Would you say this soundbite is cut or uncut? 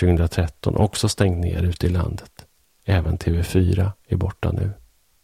uncut